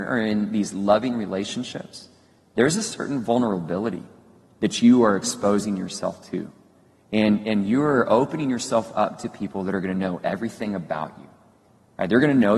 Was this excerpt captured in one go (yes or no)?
yes